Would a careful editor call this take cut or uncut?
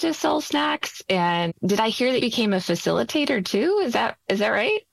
cut